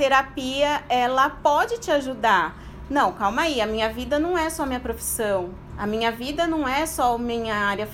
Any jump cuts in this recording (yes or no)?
no